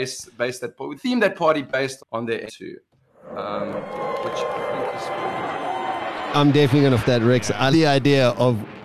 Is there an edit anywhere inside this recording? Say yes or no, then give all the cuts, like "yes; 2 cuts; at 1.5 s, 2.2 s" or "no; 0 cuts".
yes; 6 cuts; at 1.0 s, 2.0 s, 2.5 s, 6.3 s, 7.0 s, 7.7 s